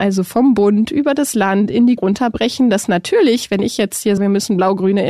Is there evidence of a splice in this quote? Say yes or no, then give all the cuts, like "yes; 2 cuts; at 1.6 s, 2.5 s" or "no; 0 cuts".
yes; 2 cuts; at 2.0 s, 4.2 s